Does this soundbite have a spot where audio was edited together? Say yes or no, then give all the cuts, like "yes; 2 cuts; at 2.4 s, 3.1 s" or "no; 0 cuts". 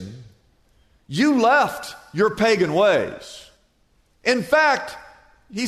no; 0 cuts